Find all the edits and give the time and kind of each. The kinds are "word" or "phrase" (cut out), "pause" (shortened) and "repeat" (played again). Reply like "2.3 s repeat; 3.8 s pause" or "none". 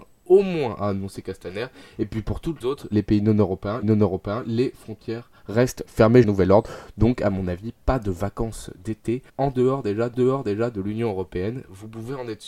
1.2 s word; 2.6 s word; 3.8 s repeat; 6.2 s word; 9.3 s pause; 10.1 s repeat